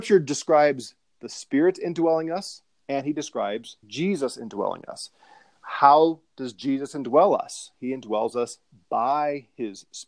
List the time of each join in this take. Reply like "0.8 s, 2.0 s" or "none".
3.8 s